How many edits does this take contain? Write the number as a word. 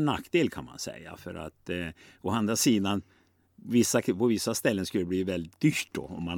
zero